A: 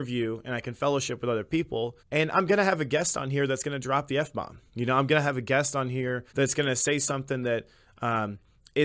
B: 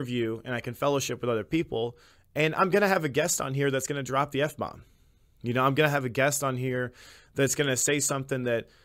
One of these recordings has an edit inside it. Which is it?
A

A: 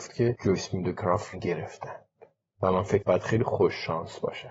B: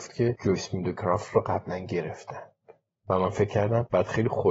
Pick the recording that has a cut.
A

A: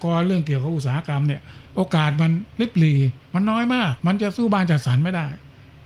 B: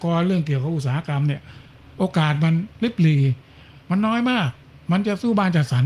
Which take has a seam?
A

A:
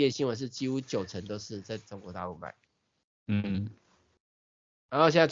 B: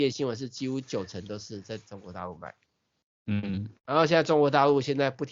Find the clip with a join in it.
B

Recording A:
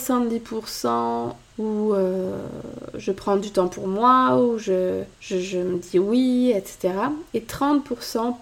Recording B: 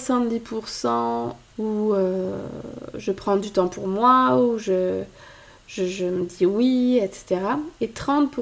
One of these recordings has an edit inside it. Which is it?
A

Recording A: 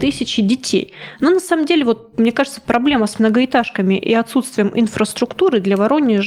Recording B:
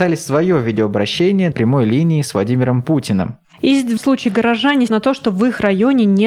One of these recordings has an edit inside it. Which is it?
B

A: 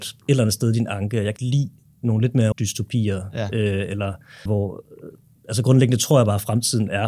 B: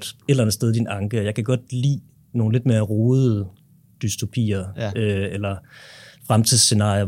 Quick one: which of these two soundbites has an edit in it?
A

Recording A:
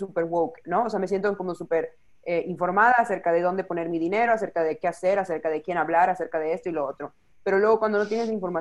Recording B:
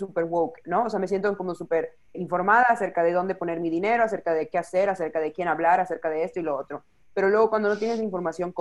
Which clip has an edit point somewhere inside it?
B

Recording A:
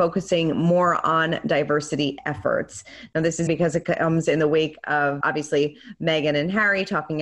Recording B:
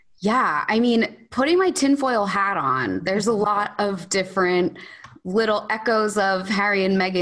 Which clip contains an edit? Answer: A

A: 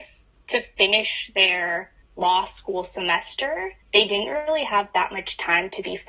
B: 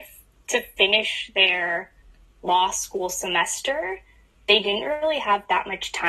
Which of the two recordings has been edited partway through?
A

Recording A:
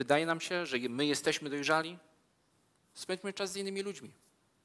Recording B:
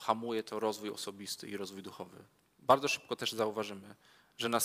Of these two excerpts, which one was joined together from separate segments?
B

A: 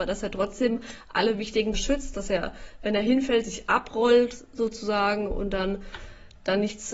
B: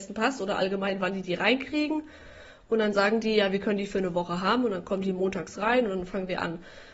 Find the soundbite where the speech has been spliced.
A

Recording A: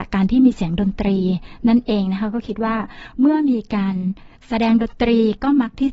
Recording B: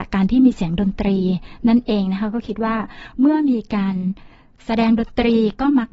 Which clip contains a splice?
A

